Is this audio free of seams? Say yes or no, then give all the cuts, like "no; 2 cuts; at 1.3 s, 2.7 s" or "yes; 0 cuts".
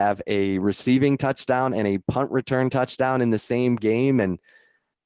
yes; 0 cuts